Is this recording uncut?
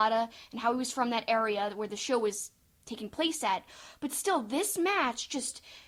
yes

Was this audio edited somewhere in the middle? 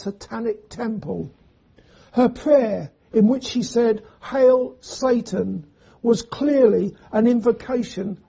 no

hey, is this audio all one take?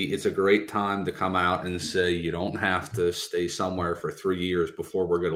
yes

